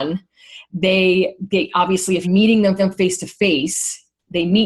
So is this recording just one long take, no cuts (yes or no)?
no